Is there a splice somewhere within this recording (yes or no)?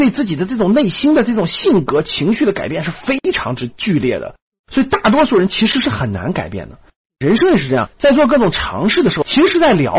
no